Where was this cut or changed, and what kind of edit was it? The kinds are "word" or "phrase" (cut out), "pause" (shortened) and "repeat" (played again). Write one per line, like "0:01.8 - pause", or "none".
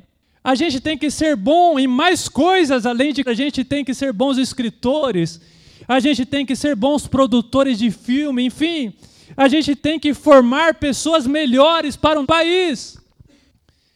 0:03.3 - word
0:09.8 - word
0:12.2 - word